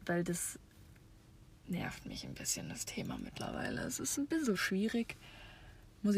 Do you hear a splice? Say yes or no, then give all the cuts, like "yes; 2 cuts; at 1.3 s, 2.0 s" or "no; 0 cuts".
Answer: no; 0 cuts